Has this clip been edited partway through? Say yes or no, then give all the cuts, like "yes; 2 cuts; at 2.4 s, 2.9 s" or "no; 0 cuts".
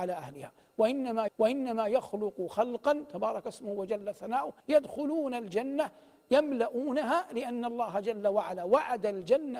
yes; 2 cuts; at 1.3 s, 4.6 s